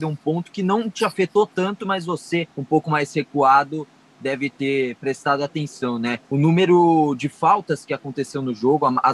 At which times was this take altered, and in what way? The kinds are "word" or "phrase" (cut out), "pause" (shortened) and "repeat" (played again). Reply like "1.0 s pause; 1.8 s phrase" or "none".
2.5 s pause; 6.2 s pause